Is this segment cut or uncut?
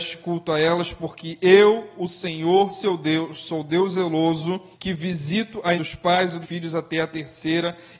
cut